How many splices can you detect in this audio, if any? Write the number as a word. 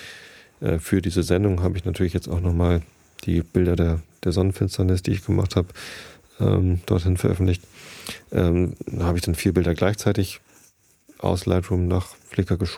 zero